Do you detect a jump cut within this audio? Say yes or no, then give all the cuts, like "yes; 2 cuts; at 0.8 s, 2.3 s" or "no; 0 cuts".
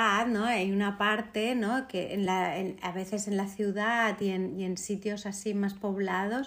no; 0 cuts